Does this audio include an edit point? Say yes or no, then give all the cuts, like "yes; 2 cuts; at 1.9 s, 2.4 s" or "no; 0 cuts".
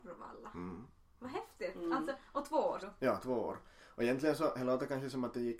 yes; 1 cut; at 2.8 s